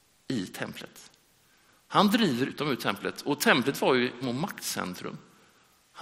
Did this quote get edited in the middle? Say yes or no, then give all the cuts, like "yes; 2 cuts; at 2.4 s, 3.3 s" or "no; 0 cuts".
yes; 2 cuts; at 2.5 s, 4.2 s